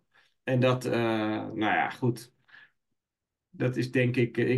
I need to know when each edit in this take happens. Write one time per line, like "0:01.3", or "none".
none